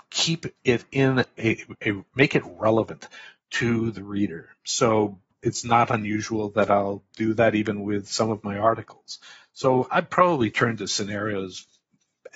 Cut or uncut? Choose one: uncut